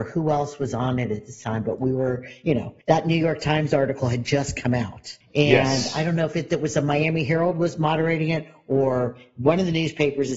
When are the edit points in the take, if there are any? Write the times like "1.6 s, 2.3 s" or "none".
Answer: 2.8 s, 5.2 s